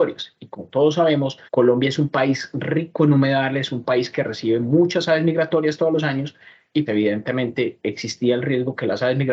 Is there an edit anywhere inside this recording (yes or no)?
yes